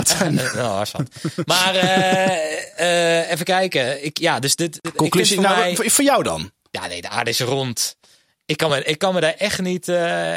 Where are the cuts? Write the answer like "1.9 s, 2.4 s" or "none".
none